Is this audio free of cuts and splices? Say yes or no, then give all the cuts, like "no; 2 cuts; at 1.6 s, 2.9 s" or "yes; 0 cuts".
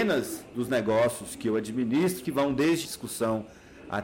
no; 2 cuts; at 2.2 s, 2.8 s